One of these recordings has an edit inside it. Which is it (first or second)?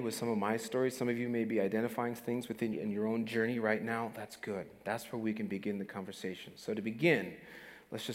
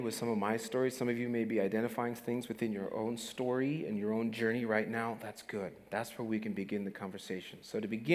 first